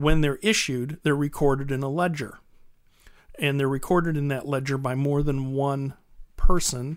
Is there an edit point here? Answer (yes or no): no